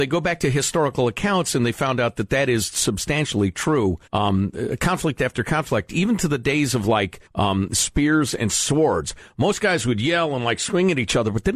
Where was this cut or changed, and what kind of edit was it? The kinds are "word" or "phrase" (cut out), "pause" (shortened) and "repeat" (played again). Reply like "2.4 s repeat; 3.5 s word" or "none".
4.1 s pause; 7.3 s pause